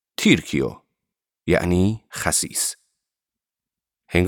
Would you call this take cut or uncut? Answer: uncut